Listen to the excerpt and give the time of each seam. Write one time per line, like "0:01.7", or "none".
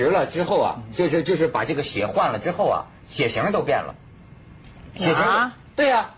none